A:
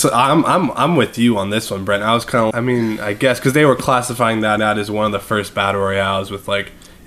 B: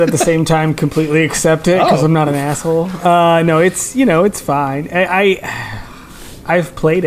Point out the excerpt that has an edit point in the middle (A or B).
A